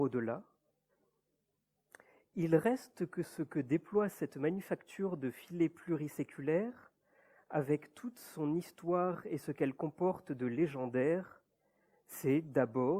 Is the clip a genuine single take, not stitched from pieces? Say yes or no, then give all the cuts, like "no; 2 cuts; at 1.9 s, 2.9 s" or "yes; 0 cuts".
yes; 0 cuts